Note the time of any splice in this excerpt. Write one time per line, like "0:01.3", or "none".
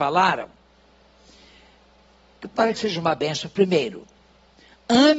0:02.8